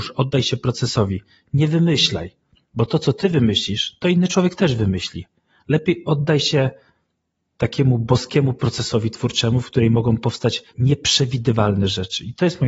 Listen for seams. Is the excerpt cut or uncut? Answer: cut